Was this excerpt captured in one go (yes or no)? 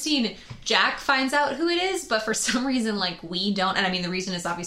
yes